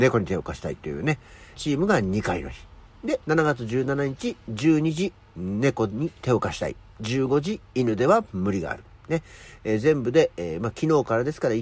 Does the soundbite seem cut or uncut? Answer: cut